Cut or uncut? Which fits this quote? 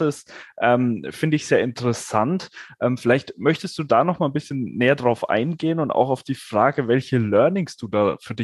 uncut